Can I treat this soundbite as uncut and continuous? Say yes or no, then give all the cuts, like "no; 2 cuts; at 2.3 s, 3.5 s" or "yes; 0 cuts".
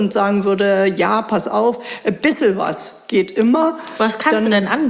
yes; 0 cuts